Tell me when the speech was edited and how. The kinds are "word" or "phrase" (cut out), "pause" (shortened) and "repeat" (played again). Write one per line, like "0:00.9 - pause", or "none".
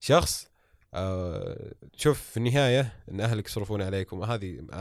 0:01.9 - pause